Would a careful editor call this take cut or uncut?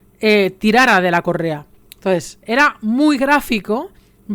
uncut